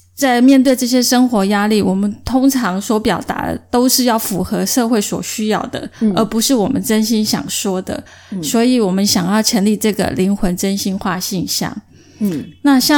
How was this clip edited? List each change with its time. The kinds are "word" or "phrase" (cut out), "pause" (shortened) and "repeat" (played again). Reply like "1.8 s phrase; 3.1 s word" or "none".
none

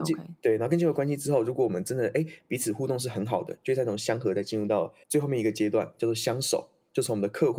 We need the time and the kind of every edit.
5.0 s pause

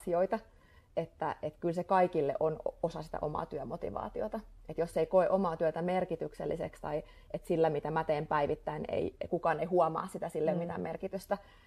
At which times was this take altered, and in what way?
none

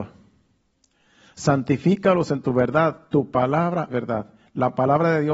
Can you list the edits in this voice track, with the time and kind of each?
3.9 s word

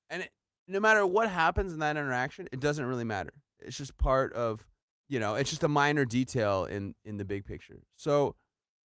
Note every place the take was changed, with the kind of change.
4.8 s pause

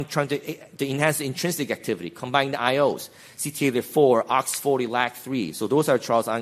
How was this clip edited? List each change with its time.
none

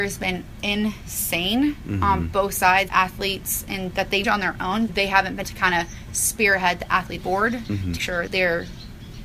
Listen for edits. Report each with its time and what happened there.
2.9 s word; 3.9 s word; 4.2 s word; 4.9 s word; 5.4 s word; 7.2 s word; 8.0 s word; 8.3 s word

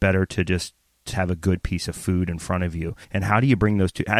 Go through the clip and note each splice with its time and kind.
1.1 s word; 3.0 s pause

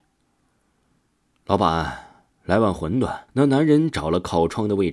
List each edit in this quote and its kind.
2.3 s pause; 3.3 s pause

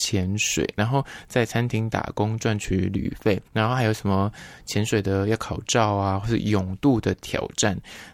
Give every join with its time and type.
3.5 s pause

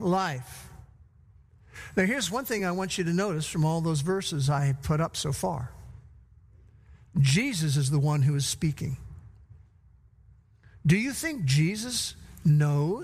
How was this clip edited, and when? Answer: none

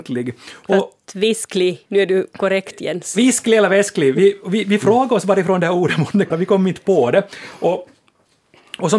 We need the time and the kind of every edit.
1.9 s pause; 6.3 s word

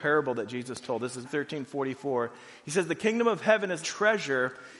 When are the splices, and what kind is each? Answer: 1.2 s word; 3.8 s word

